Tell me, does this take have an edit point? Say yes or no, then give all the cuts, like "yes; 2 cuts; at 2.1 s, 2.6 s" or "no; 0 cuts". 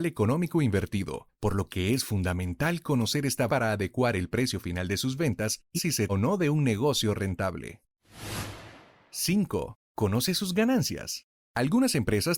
yes; 4 cuts; at 3.5 s, 5.8 s, 6.1 s, 9.8 s